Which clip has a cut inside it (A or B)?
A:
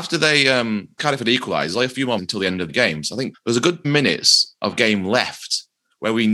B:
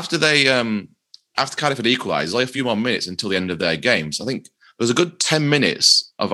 A